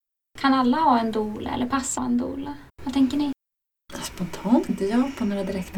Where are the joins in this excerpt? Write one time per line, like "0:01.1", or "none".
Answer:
0:02.0
0:02.7
0:04.7